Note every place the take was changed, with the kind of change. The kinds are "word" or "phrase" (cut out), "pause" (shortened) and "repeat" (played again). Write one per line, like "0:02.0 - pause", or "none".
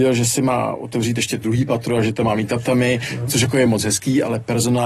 none